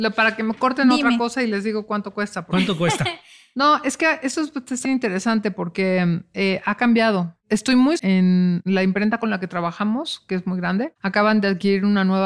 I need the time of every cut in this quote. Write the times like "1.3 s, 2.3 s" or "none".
4.9 s, 8.0 s